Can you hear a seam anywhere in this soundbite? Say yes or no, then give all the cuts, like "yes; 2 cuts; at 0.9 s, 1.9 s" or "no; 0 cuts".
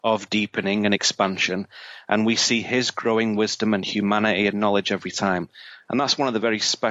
no; 0 cuts